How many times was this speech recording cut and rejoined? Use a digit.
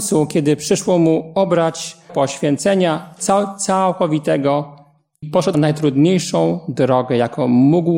3